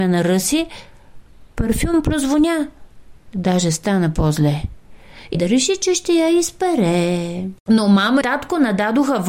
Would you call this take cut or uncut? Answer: cut